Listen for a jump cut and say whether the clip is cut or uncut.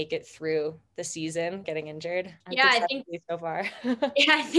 cut